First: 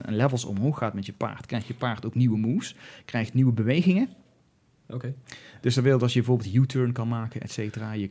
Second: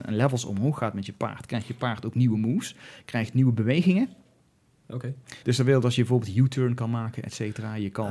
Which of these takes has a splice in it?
second; 1 cut; at 5.4 s

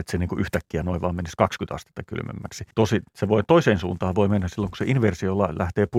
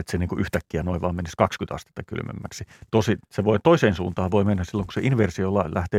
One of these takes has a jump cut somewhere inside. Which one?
first; 1 cut; at 2.7 s

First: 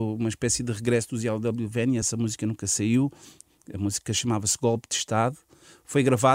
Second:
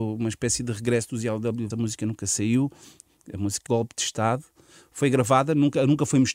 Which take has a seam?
second; 2 cuts; at 1.7 s, 3.7 s

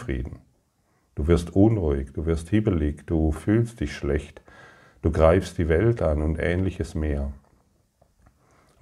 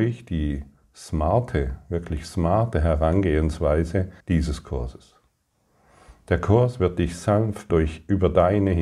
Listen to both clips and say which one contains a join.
second; 2 cuts; at 4.2 s, 7.7 s

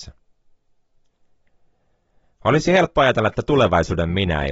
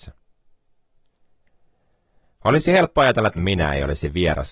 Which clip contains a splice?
second; 1 cut; at 3.4 s

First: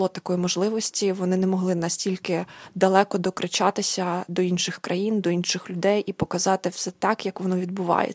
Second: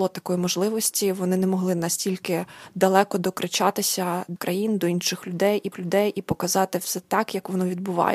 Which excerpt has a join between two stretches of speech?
second; 2 cuts; at 4.4 s, 5.7 s

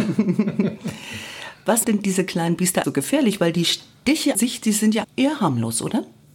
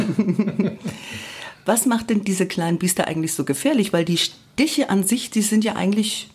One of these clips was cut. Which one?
first; 4 cuts; at 1.8 s, 2.8 s, 4.3 s, 5.0 s

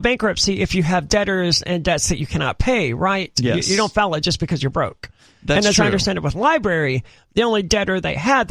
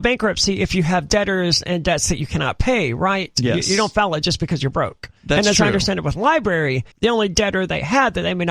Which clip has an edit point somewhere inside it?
second; 2 cuts; at 5.2 s, 6.9 s

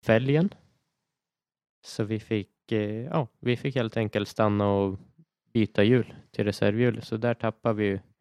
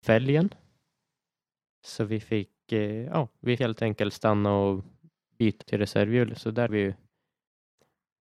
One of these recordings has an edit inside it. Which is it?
second; 3 cuts; at 3.6 s, 5.6 s, 6.7 s

